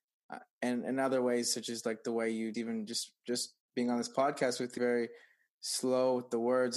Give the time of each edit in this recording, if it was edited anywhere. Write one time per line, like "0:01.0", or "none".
0:02.5
0:04.8